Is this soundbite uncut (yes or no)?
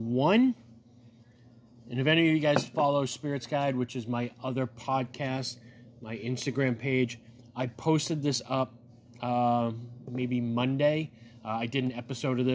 yes